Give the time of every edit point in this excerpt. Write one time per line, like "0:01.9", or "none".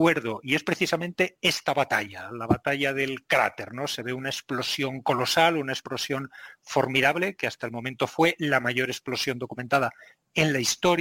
none